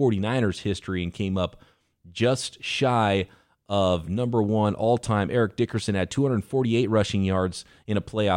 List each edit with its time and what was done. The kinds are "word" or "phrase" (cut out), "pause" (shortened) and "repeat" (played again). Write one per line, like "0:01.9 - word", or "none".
none